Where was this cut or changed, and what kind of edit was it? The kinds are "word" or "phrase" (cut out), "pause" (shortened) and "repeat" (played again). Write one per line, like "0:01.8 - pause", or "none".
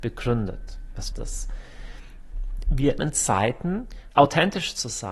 0:01.1 - word
0:03.0 - word
0:04.1 - word